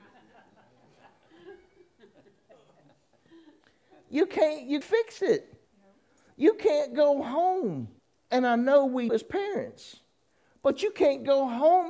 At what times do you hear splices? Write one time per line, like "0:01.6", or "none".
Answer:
0:04.8
0:05.7
0:08.0
0:09.1